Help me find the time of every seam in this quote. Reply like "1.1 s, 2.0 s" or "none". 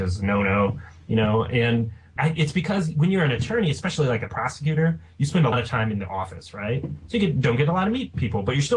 2.2 s, 5.5 s

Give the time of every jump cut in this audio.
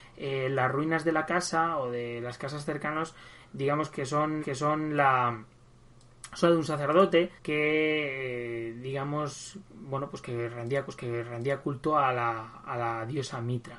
4.4 s, 6.4 s, 7.4 s, 10.9 s

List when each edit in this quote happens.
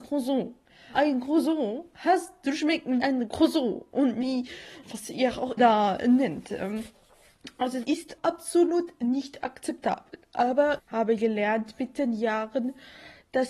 0.9 s, 3.0 s, 4.2 s, 4.8 s, 5.6 s, 7.8 s, 8.2 s, 10.8 s

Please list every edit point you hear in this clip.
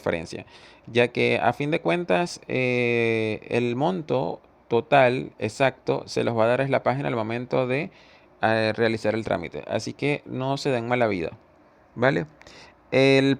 none

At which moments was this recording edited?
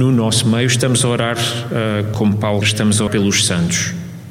2.1 s, 2.6 s, 3.1 s

